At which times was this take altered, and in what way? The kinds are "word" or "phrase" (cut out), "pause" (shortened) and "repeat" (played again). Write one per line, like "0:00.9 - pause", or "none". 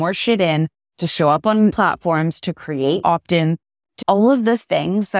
0:01.7 - word
0:03.0 - word
0:04.0 - word